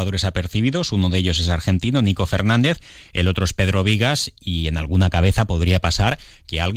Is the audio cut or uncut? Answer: uncut